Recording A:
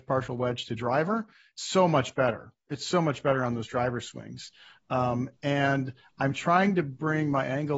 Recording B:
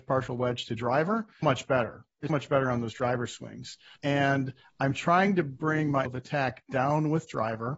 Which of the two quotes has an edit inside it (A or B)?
B